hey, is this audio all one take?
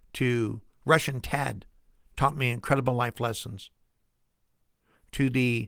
yes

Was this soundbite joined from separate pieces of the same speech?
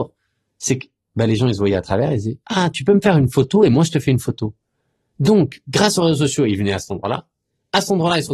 no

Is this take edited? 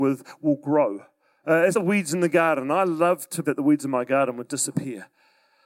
yes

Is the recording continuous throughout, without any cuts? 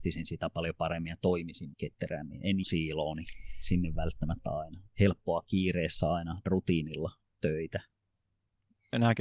no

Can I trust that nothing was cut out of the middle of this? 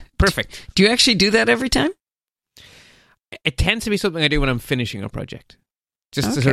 yes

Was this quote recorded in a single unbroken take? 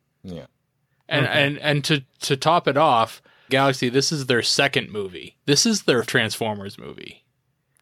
no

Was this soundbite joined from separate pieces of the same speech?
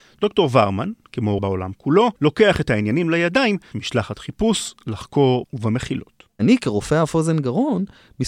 yes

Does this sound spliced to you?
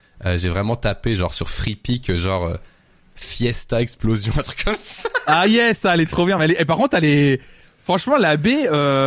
no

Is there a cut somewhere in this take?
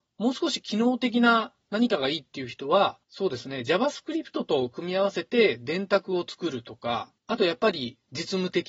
yes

